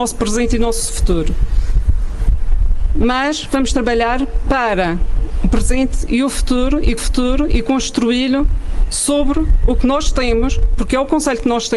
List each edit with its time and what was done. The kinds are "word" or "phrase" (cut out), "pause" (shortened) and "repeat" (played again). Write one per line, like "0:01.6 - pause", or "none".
0:07.0 - repeat